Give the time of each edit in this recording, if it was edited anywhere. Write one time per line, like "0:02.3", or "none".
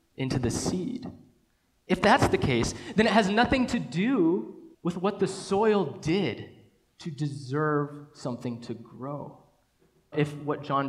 0:04.7